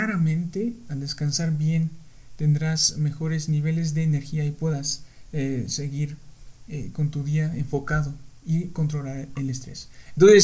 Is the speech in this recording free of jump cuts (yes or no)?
yes